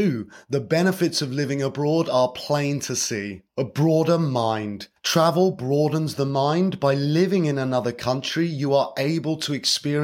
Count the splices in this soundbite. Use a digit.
2